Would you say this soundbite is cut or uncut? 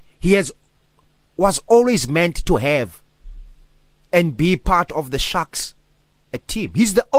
uncut